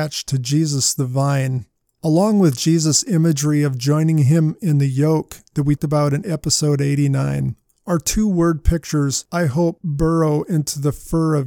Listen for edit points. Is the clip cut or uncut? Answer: cut